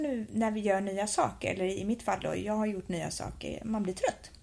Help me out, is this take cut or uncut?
uncut